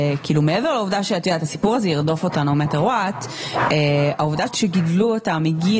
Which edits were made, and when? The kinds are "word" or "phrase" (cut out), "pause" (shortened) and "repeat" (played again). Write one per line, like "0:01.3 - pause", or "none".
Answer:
0:04.5 - word